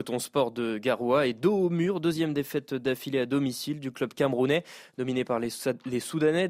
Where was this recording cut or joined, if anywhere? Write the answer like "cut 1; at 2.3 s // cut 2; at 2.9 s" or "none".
none